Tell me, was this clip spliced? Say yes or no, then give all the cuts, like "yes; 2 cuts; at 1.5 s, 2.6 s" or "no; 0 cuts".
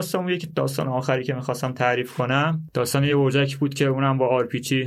no; 0 cuts